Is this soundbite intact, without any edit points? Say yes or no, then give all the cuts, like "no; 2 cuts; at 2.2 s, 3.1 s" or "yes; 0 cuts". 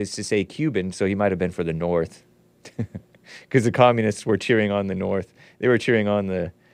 yes; 0 cuts